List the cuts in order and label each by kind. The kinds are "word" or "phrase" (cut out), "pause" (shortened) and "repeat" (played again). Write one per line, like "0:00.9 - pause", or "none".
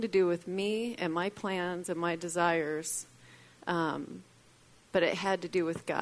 none